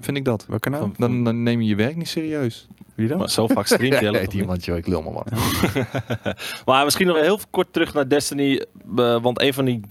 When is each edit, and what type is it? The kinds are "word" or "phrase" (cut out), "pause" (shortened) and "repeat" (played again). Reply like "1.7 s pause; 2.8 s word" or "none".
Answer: 1.2 s word; 7.1 s word